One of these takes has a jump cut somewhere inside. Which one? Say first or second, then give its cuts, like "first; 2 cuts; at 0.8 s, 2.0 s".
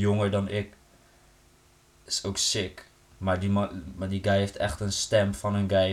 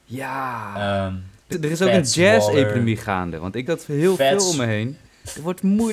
second; 2 cuts; at 1.5 s, 3.7 s